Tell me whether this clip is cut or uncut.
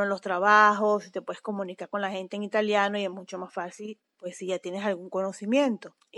uncut